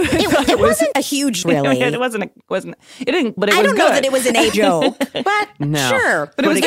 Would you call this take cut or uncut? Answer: cut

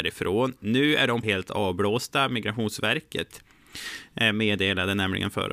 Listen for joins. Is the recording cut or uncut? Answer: cut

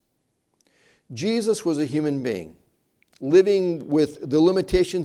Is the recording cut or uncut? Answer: uncut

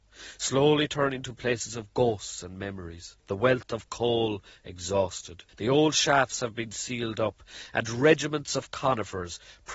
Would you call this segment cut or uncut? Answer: cut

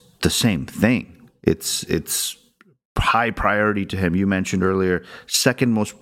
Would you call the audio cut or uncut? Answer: uncut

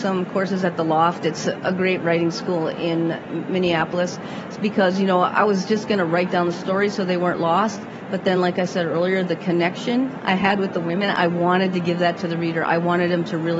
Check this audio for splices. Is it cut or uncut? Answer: uncut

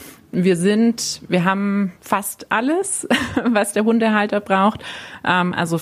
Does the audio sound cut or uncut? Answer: cut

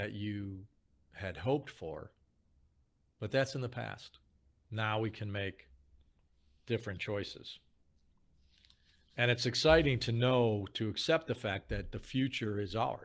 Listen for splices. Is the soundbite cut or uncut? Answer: uncut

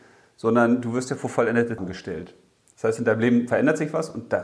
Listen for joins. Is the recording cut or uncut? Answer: cut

